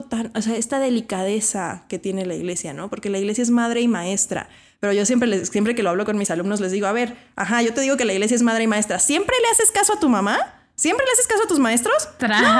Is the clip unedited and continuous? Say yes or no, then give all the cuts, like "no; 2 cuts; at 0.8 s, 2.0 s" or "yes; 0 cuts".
yes; 0 cuts